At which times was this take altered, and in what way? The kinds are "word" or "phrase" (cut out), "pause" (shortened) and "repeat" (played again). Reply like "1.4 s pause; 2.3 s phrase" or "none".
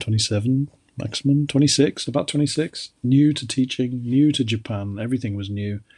3.0 s pause